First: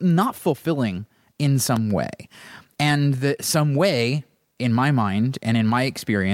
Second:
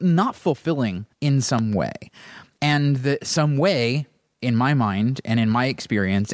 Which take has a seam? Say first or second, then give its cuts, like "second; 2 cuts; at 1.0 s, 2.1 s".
second; 1 cut; at 1.1 s